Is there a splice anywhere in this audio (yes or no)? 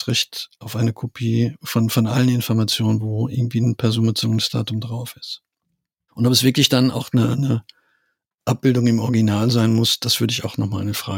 no